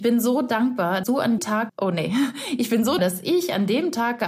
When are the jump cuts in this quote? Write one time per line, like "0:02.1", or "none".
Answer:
0:01.0
0:01.4
0:01.7
0:03.0